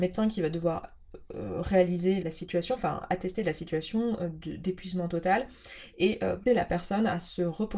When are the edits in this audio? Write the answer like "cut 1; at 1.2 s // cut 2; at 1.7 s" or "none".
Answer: cut 1; at 2.2 s // cut 2; at 6.5 s